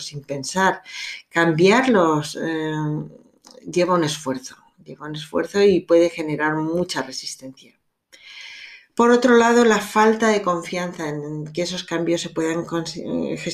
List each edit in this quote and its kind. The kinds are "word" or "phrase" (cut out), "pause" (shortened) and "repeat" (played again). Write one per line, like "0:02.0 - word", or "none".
none